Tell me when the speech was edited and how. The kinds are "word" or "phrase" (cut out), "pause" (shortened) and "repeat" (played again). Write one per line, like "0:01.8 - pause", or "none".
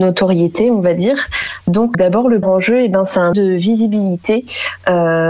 0:01.9 - word
0:02.4 - word
0:03.3 - word